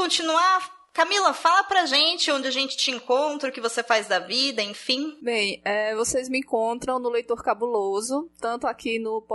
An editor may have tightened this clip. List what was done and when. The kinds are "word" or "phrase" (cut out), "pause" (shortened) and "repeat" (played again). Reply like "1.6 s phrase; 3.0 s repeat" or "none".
none